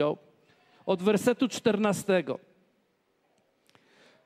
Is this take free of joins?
yes; 0 cuts

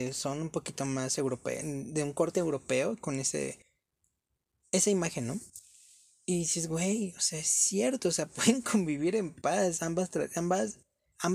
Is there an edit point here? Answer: no; 0 cuts

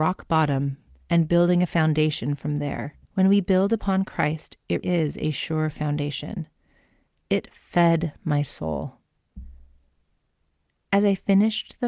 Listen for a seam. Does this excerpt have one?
yes; 2 cuts; at 3.0 s, 4.8 s

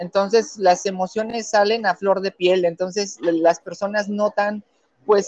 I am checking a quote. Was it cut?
no; 0 cuts

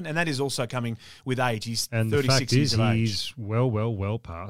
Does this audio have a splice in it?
no; 0 cuts

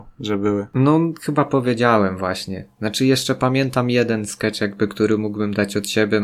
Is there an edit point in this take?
no; 0 cuts

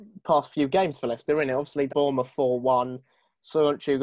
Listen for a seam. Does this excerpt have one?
yes; 1 cut; at 1.9 s

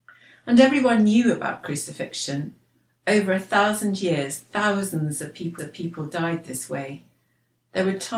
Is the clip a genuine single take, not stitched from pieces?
no; 1 cut; at 5.6 s

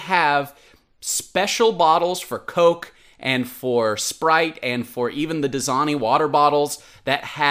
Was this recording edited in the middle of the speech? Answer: no; 0 cuts

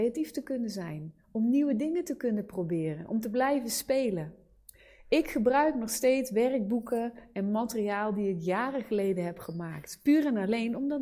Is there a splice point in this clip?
no; 0 cuts

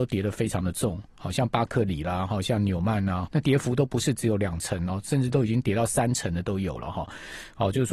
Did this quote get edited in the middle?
yes; 1 cut; at 3.3 s

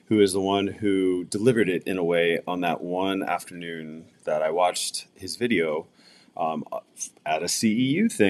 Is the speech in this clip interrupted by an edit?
no; 0 cuts

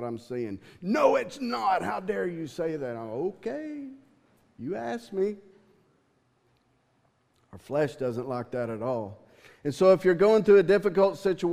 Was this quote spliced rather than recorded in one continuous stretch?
no; 0 cuts

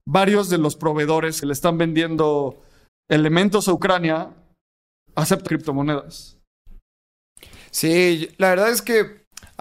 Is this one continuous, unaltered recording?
no; 3 cuts; at 1.4 s, 2.9 s, 5.5 s

